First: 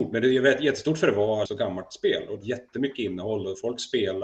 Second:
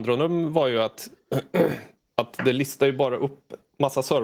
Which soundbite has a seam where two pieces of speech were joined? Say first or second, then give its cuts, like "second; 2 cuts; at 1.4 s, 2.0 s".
first; 2 cuts; at 1.5 s, 2.4 s